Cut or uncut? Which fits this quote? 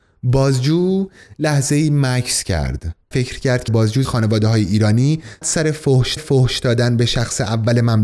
cut